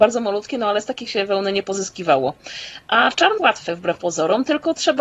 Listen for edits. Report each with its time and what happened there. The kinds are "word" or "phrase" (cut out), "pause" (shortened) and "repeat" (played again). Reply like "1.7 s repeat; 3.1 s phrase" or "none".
1.1 s word; 3.4 s word